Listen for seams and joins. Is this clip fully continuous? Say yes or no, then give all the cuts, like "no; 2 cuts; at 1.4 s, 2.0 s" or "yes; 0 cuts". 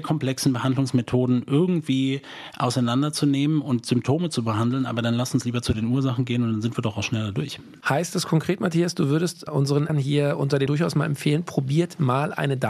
no; 3 cuts; at 9.5 s, 9.9 s, 10.7 s